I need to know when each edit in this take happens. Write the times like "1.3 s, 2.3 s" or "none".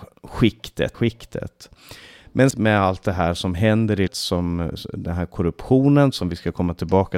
0.9 s, 2.5 s, 4.1 s